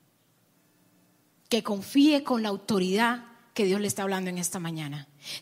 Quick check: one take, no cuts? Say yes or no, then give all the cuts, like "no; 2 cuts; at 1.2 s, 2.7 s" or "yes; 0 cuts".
yes; 0 cuts